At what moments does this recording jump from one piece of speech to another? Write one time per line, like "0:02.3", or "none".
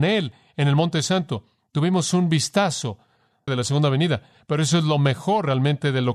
0:03.5